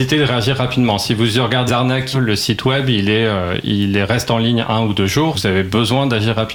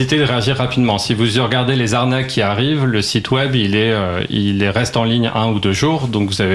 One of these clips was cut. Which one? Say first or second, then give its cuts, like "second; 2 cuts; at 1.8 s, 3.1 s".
first; 3 cuts; at 1.7 s, 2.1 s, 5.3 s